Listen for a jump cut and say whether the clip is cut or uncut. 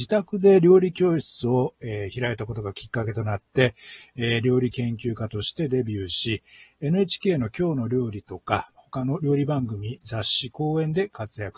uncut